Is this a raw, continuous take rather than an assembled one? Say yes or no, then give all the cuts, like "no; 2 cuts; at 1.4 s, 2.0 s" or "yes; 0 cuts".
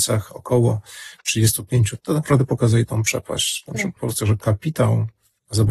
no; 2 cuts; at 2.0 s, 4.0 s